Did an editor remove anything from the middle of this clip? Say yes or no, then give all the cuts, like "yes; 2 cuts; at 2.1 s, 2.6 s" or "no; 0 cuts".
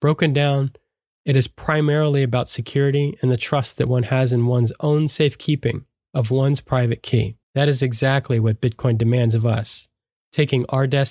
yes; 1 cut; at 7.4 s